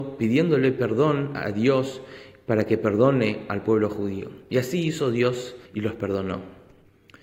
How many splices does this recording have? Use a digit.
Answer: 1